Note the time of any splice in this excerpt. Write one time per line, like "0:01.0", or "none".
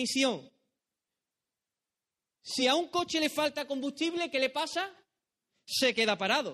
none